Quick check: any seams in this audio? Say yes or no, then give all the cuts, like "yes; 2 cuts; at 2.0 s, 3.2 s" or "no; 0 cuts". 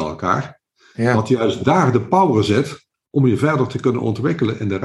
no; 0 cuts